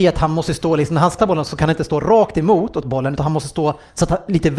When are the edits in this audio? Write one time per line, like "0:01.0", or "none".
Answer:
0:01.2
0:02.8